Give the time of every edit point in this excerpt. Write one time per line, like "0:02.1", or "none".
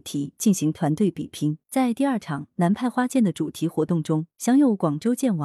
0:01.6
0:04.3

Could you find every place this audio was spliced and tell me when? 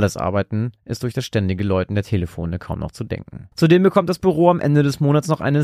0:03.5

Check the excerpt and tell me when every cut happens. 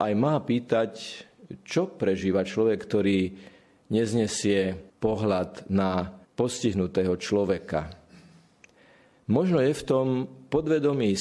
0:04.9
0:06.2

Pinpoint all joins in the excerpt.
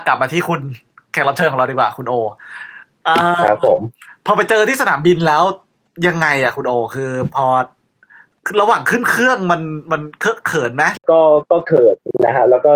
none

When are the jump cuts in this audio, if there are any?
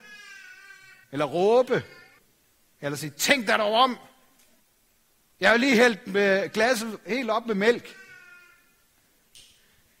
0:01.0
0:02.2
0:04.6

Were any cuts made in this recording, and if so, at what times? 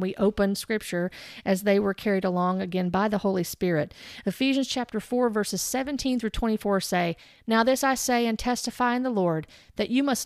none

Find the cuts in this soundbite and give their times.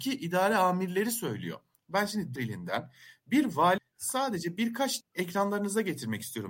0:02.4
0:03.8
0:05.0

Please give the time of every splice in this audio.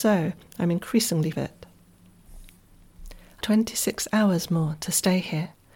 0:01.3
0:03.4

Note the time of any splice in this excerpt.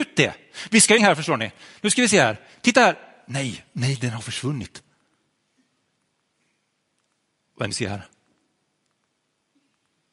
0:01.0
0:07.7

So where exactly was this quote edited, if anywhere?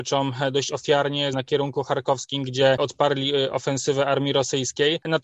0:01.3
0:02.8

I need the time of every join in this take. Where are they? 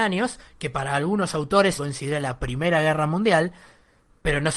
0:01.8

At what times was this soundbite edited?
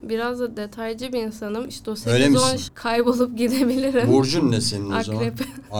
0:02.7

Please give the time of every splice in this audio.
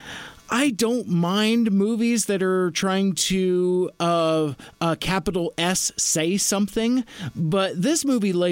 none

